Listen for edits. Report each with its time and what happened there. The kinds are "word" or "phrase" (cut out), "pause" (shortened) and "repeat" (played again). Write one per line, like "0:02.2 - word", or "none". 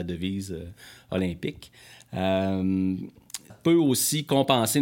0:03.5 - word